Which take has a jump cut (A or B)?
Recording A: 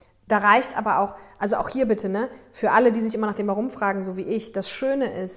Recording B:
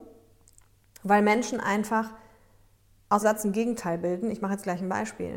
B